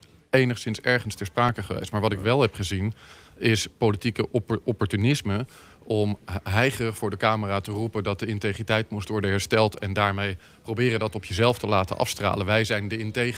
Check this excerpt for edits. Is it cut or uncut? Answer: uncut